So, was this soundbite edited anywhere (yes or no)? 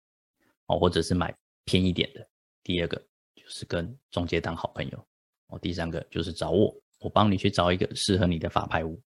no